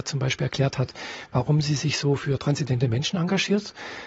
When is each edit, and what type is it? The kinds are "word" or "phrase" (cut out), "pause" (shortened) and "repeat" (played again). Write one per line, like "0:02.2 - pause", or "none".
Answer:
none

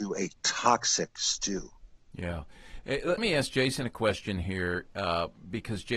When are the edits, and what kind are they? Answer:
0:03.2 - word

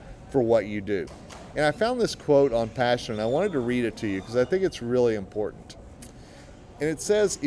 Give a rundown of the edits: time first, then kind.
none

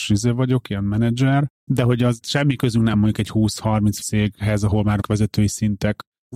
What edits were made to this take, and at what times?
0:02.2 - word
0:02.9 - word
0:04.0 - word
0:05.0 - word

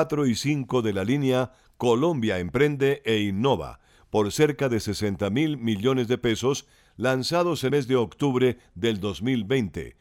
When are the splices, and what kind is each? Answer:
0:07.7 - word

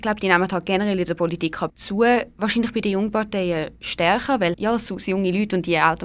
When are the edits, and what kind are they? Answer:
0:01.7 - word
0:03.8 - pause
0:04.5 - word

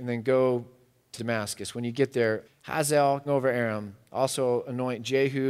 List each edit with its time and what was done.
0:01.2 - phrase
0:02.4 - word
0:03.3 - word

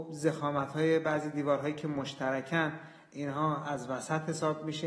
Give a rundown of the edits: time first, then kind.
none

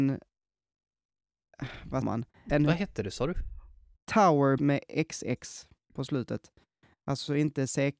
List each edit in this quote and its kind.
0:02.0 - word
0:02.5 - word
0:04.6 - word

